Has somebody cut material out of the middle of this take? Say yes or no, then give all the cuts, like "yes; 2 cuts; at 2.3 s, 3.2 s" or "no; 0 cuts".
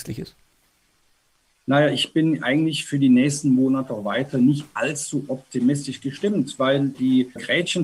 no; 0 cuts